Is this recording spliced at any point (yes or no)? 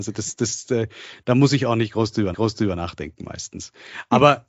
yes